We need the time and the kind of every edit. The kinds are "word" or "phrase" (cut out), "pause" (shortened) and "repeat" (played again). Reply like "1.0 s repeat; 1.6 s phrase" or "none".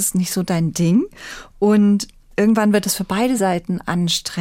none